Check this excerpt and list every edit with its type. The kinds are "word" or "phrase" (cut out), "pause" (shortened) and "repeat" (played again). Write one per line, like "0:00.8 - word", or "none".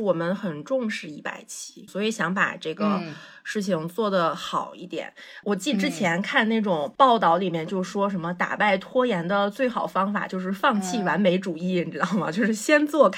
0:01.9 - phrase